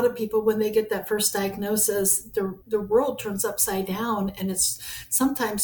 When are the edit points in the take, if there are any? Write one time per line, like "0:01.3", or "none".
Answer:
0:02.6